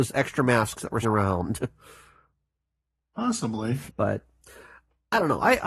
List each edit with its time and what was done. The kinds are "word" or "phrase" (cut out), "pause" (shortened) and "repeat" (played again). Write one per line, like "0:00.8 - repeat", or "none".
0:01.0 - word
0:03.9 - pause